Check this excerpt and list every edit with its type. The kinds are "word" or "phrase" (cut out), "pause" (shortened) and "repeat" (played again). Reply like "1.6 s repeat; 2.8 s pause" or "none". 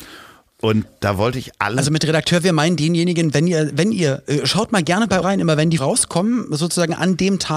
5.2 s word; 5.8 s word

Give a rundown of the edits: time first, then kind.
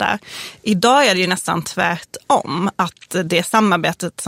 none

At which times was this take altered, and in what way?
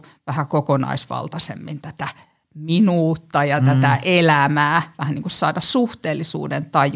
none

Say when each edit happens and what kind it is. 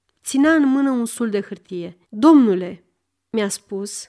2.0 s pause

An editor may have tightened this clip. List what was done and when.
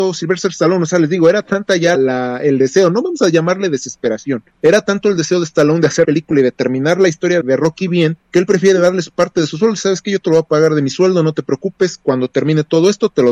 1.9 s word; 4.5 s pause; 6.0 s word; 7.4 s word; 8.2 s pause

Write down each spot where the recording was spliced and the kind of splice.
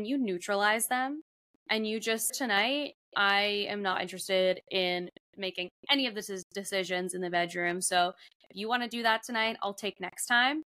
2.3 s phrase

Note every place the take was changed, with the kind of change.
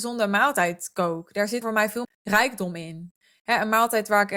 1.6 s word; 2.0 s word

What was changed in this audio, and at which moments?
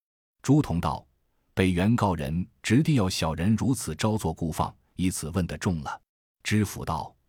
6.1 s pause

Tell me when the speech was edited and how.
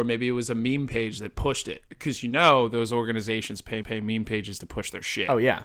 1.9 s word; 3.8 s repeat

